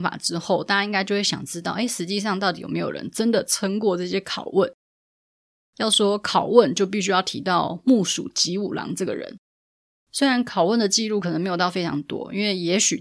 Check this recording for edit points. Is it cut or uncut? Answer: uncut